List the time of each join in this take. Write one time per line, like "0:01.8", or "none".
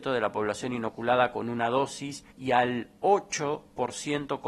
0:02.3